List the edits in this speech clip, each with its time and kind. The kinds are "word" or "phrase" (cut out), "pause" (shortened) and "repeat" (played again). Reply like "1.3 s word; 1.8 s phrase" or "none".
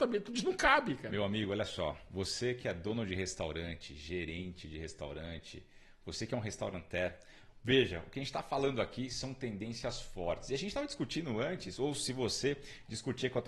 none